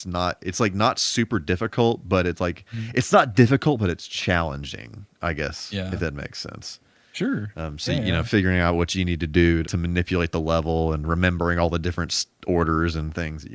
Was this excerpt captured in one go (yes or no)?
no